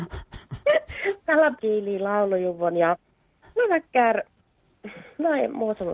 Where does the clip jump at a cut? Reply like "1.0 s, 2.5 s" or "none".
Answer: 1.6 s, 3.6 s